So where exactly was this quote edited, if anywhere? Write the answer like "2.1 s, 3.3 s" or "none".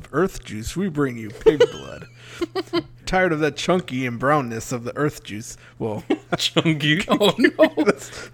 3.0 s